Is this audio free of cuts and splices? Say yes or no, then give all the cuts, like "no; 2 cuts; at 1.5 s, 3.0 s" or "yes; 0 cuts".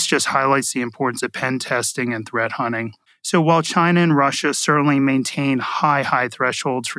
yes; 0 cuts